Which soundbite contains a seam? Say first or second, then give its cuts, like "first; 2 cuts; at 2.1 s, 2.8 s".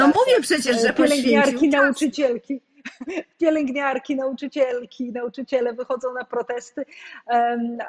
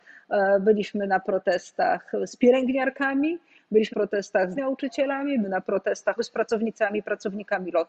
second; 4 cuts; at 3.9 s, 4.6 s, 5.4 s, 6.2 s